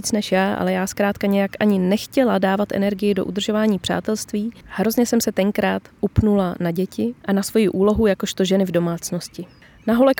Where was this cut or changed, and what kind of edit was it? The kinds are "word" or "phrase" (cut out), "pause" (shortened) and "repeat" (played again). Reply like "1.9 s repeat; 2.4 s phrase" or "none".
7.2 s pause